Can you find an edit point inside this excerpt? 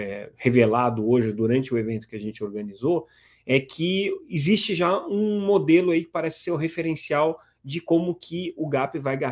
no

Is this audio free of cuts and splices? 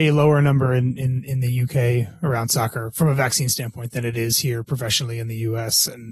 yes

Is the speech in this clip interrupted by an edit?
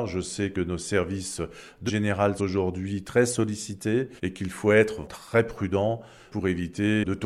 yes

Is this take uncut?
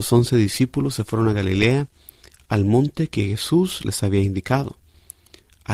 yes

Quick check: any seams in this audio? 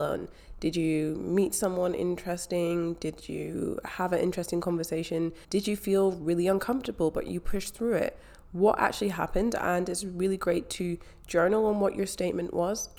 yes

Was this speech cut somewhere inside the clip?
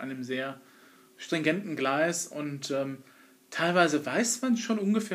no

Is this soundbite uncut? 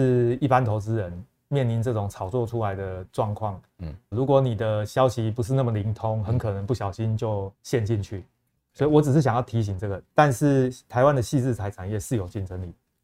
no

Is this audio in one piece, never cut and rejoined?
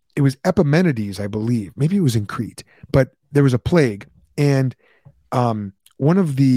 yes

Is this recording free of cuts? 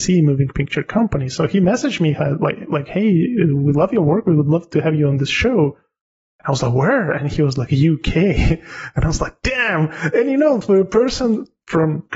yes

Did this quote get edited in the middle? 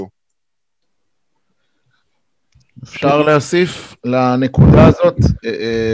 yes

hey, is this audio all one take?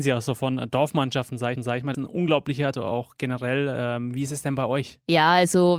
no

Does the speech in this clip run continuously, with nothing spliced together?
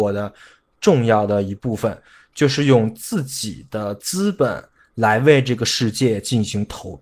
yes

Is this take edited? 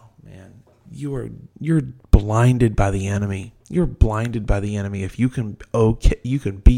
yes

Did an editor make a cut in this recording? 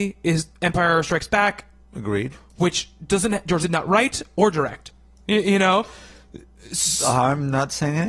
yes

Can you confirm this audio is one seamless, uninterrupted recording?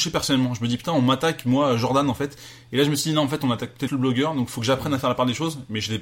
no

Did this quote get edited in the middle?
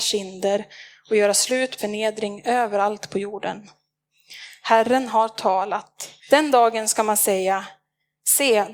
yes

